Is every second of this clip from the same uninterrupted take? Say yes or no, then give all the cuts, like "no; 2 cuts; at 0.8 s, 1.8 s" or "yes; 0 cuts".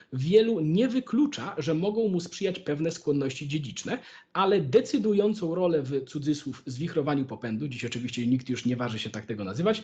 yes; 0 cuts